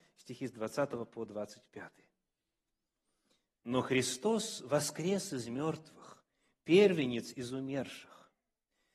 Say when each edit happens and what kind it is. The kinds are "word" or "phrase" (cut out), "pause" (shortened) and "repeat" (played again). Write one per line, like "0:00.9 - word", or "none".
none